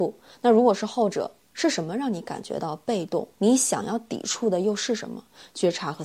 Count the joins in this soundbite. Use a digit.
1